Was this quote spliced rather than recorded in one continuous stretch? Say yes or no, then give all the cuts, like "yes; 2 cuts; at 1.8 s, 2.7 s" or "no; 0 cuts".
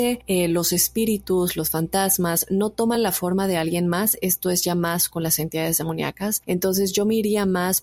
no; 0 cuts